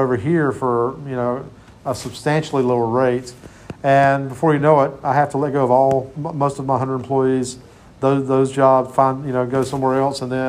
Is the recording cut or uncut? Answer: uncut